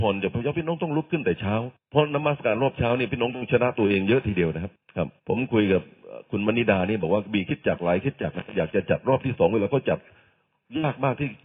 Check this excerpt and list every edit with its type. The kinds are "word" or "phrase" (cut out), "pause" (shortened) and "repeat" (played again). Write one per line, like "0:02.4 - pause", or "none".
0:05.2 - pause